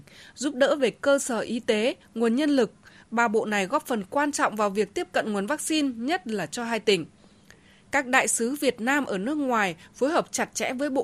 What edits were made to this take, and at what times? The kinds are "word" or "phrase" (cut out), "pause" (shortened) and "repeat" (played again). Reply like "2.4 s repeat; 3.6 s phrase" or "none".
none